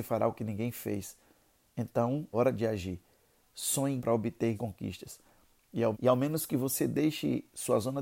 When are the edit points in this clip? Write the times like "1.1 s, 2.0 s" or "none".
2.3 s, 4.0 s, 4.5 s, 5.9 s